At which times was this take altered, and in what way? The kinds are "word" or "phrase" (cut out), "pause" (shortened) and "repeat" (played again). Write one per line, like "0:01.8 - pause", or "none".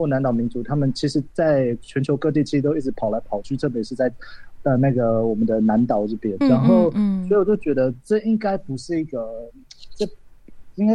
0:06.4 - word